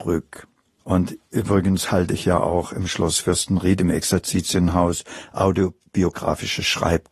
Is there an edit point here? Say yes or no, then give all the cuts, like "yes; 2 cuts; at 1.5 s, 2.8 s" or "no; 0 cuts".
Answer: no; 0 cuts